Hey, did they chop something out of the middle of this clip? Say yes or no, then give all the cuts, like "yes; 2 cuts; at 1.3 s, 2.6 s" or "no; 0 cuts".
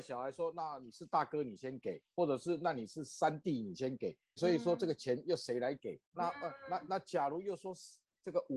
yes; 2 cuts; at 4.4 s, 6.0 s